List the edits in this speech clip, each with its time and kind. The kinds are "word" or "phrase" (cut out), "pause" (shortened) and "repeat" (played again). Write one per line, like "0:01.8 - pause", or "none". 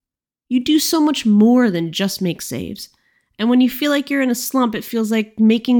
none